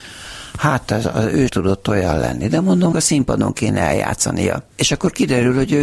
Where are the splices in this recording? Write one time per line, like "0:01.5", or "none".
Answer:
0:01.5
0:02.9
0:04.7